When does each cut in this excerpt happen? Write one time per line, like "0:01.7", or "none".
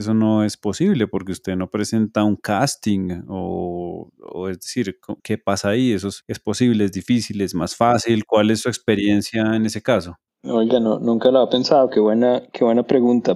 0:05.2